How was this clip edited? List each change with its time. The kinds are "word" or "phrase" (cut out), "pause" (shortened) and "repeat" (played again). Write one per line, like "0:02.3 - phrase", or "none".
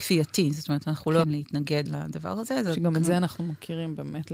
0:01.2 - word
0:01.9 - word